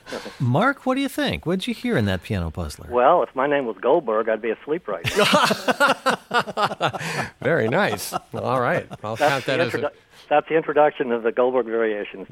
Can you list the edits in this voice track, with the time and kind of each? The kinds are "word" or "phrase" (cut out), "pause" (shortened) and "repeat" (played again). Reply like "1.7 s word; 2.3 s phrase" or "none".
none